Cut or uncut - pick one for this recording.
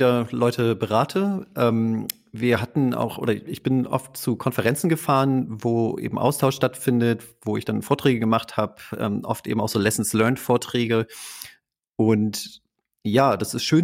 uncut